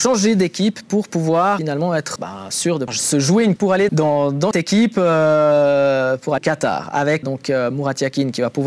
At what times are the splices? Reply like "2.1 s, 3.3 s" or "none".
1.6 s, 2.2 s, 2.9 s, 3.6 s, 3.9 s, 4.5 s, 6.4 s, 7.2 s